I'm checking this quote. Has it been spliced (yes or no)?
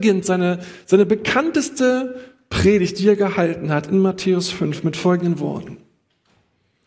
no